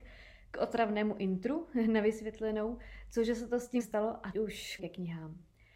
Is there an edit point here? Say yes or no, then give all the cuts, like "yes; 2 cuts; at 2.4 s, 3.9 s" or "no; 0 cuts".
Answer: yes; 3 cuts; at 3.8 s, 4.3 s, 4.8 s